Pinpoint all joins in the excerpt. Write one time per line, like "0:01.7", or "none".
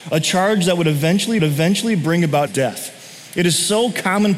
0:01.4
0:02.5